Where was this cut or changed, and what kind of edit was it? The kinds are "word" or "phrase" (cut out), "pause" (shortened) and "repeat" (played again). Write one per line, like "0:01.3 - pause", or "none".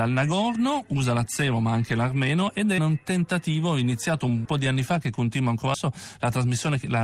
0:02.8 - word
0:04.4 - word
0:05.7 - word